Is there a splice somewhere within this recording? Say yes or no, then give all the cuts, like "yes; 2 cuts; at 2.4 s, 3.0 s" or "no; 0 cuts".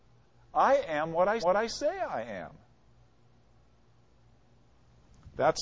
yes; 1 cut; at 1.4 s